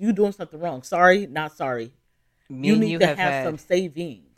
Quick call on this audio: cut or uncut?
uncut